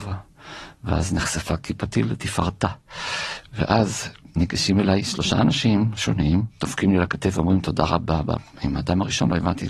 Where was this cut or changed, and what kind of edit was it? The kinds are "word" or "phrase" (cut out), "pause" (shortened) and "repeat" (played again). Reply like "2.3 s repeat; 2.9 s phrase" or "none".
none